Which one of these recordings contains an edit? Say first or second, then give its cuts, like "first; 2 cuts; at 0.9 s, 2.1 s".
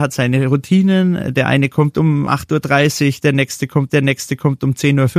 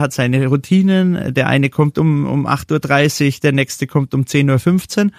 first; 2 cuts; at 2.3 s, 3.9 s